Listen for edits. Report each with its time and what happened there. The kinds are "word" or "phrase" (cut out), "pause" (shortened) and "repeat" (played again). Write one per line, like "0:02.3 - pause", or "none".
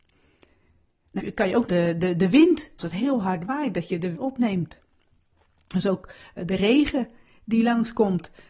0:01.2 - word
0:01.7 - word
0:02.8 - word
0:04.1 - word